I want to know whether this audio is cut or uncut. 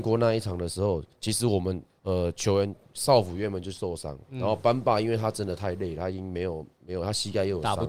cut